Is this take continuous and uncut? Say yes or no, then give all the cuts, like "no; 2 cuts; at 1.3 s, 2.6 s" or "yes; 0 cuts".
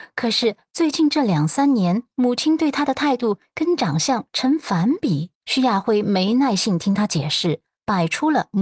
no; 1 cut; at 5.3 s